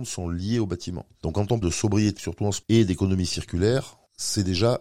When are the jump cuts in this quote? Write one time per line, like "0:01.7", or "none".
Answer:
0:01.6
0:02.2
0:02.6